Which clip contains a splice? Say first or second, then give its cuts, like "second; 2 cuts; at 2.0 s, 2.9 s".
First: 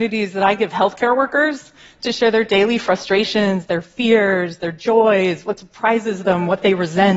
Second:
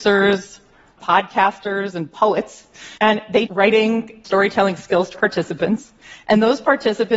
second; 5 cuts; at 1.0 s, 3.0 s, 3.5 s, 4.2 s, 5.1 s